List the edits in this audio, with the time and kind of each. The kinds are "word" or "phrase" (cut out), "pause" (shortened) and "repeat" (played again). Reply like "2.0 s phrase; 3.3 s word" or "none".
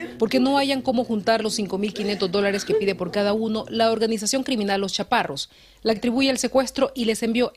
6.0 s word